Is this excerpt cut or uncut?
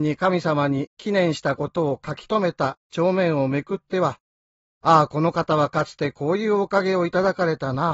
uncut